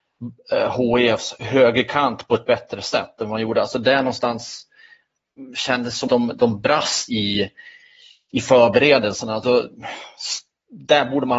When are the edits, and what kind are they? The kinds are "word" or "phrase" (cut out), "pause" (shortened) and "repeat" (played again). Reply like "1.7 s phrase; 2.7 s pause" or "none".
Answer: 6.1 s word; 7.1 s word